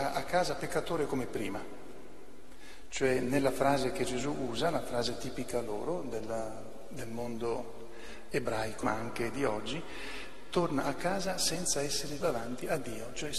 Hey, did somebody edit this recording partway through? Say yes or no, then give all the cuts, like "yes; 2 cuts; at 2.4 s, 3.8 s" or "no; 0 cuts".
yes; 2 cuts; at 8.8 s, 12.2 s